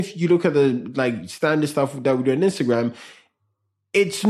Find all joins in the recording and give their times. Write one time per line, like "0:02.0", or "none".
none